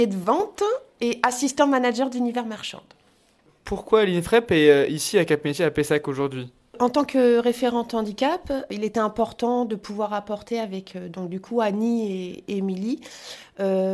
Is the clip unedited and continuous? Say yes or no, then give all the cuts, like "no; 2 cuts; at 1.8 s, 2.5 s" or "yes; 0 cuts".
yes; 0 cuts